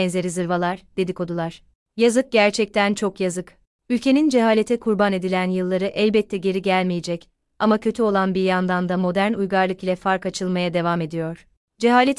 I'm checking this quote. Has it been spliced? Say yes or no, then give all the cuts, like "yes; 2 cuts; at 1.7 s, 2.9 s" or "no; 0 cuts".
no; 0 cuts